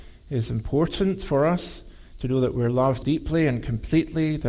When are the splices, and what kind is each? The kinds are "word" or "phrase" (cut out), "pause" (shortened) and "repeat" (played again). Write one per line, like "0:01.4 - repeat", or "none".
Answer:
0:03.0 - word